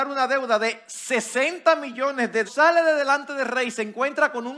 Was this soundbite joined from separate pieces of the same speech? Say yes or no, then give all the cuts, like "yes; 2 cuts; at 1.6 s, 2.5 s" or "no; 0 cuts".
yes; 1 cut; at 2.5 s